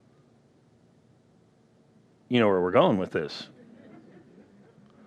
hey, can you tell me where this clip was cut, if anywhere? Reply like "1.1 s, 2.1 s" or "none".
none